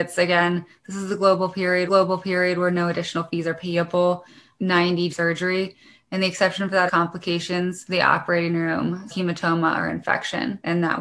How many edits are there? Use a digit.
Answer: 4